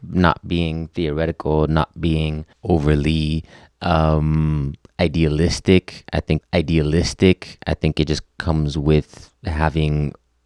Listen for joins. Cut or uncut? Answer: cut